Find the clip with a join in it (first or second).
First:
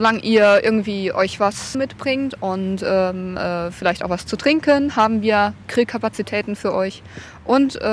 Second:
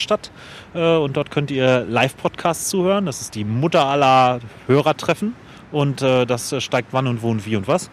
first